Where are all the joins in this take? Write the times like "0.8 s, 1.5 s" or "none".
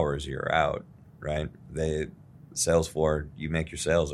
none